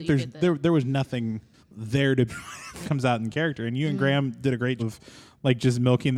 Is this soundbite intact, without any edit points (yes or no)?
no